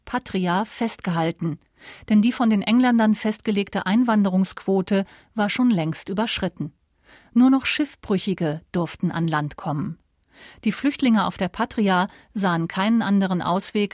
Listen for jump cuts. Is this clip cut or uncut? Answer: uncut